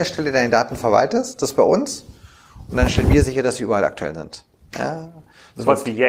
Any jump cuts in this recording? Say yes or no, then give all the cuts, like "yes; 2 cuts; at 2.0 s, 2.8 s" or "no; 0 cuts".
no; 0 cuts